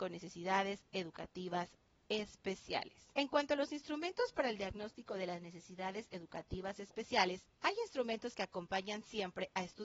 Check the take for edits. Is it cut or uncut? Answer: cut